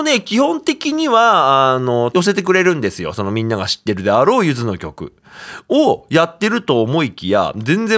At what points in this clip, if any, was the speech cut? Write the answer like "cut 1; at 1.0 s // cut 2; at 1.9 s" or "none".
cut 1; at 2.1 s